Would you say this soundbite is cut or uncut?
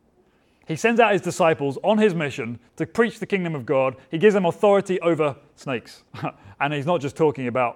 cut